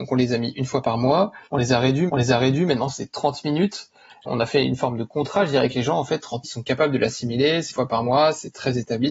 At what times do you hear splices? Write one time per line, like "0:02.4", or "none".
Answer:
0:01.5
0:02.1
0:04.3
0:06.4
0:07.7

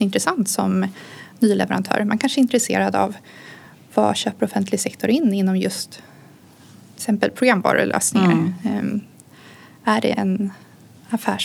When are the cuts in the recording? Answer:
none

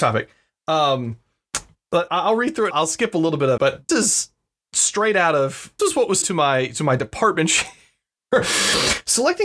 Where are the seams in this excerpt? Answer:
0:02.1
0:02.7
0:03.6
0:03.9
0:05.8
0:06.2

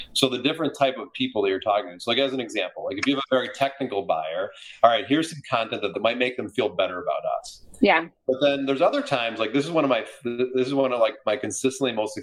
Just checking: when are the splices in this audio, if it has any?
0:05.9

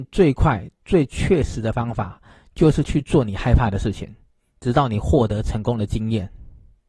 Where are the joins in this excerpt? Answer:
none

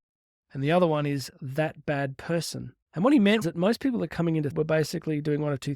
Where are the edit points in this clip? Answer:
0:02.8
0:03.4
0:04.1
0:04.5

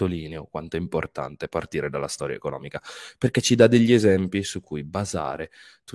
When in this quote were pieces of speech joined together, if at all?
none

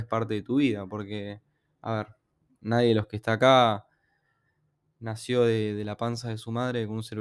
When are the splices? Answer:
none

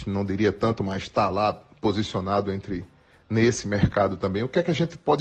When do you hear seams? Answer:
none

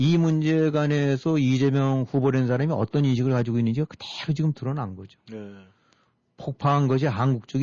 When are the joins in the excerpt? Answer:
none

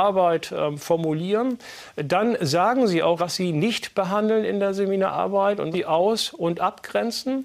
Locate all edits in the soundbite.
0:03.2
0:05.7

